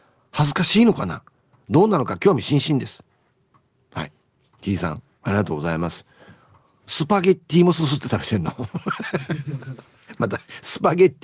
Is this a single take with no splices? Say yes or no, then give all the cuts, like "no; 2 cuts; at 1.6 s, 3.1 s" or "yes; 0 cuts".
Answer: yes; 0 cuts